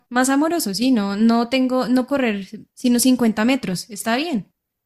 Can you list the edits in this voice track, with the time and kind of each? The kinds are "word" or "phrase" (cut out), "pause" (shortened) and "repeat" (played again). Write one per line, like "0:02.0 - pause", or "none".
0:02.1 - word